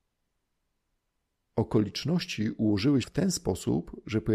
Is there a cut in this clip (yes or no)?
yes